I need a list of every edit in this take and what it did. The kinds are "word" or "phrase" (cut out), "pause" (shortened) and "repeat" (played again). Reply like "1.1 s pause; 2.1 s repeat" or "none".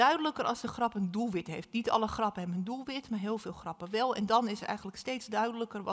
none